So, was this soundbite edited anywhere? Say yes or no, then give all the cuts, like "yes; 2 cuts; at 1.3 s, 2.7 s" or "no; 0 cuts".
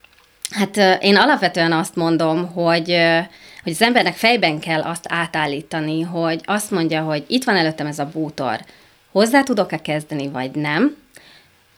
no; 0 cuts